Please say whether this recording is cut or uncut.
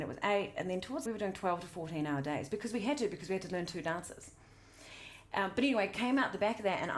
cut